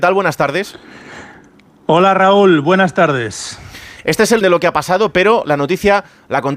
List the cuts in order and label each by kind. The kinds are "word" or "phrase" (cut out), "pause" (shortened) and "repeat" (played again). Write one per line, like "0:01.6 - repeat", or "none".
0:04.4 - word